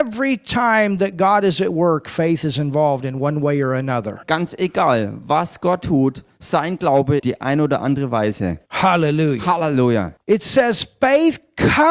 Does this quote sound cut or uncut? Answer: cut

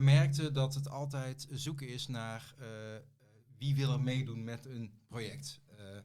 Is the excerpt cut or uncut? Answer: uncut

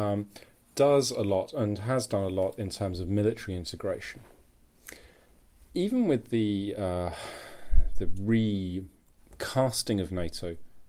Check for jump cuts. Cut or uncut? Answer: uncut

